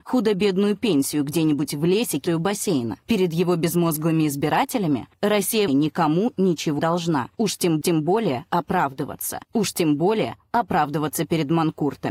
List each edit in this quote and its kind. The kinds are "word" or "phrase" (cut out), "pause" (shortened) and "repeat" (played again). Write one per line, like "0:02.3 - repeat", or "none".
0:02.3 - phrase
0:05.7 - word
0:06.8 - word
0:07.8 - repeat
0:09.4 - pause

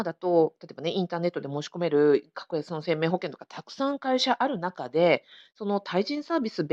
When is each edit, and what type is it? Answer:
none

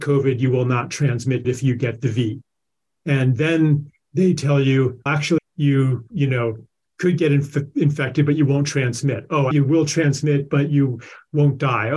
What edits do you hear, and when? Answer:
0:01.4 - word
0:05.1 - word
0:05.4 - word
0:09.5 - word

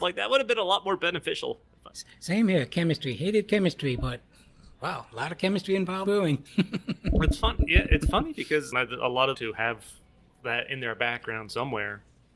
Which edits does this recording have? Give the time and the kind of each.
0:04.7 - pause
0:06.1 - word
0:08.7 - phrase
0:09.3 - phrase

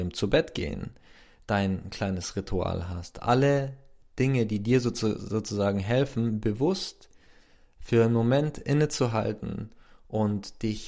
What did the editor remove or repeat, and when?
none

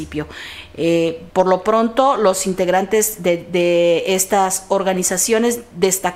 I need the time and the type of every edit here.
0:01.3 - pause

